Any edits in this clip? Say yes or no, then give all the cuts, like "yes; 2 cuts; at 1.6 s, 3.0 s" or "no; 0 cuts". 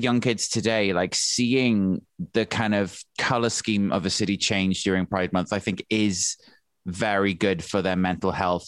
yes; 1 cut; at 3.1 s